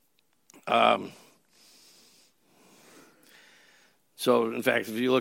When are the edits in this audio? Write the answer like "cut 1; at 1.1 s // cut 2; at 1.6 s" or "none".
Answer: none